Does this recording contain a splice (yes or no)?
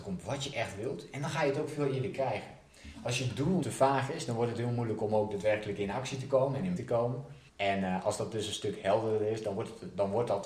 yes